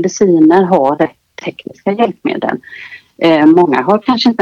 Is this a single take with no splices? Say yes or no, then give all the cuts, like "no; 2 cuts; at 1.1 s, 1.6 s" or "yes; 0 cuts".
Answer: yes; 0 cuts